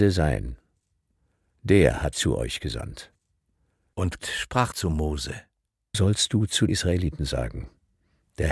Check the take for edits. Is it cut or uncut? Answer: cut